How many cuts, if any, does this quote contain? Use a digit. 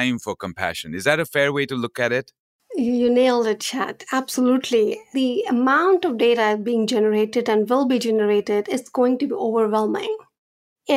0